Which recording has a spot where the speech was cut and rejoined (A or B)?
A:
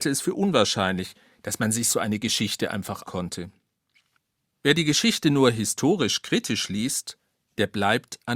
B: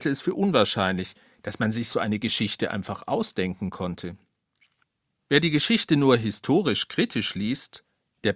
A